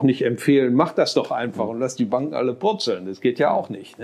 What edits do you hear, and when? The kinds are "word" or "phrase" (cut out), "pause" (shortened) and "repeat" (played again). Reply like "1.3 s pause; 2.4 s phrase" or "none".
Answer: none